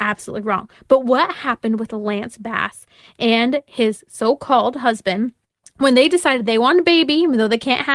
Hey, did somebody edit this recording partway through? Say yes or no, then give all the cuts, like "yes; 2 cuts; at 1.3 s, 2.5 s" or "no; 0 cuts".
no; 0 cuts